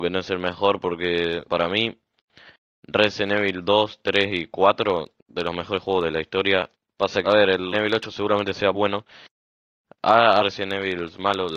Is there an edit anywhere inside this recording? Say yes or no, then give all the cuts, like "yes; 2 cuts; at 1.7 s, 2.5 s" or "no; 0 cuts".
yes; 6 cuts; at 1.5 s, 5.2 s, 7.2 s, 7.7 s, 8.7 s, 10.4 s